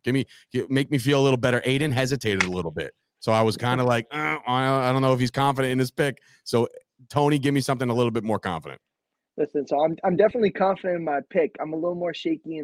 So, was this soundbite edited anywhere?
no; 0 cuts

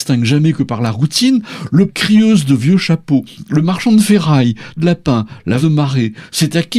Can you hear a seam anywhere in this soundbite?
yes; 3 cuts; at 1.9 s, 4.8 s, 5.6 s

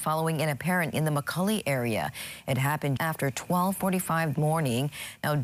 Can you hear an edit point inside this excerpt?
yes; 3 cuts; at 0.9 s, 3.0 s, 4.3 s

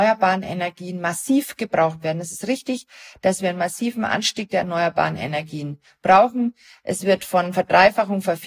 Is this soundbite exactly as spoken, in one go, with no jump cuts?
yes; 0 cuts

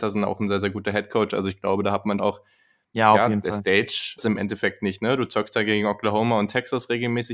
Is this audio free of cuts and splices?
no; 2 cuts; at 2.2 s, 4.2 s

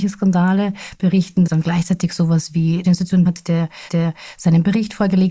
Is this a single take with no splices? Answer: no; 4 cuts; at 1.5 s, 2.8 s, 3.3 s, 3.9 s

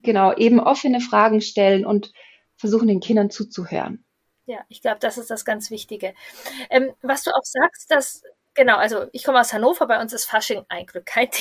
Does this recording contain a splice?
no; 0 cuts

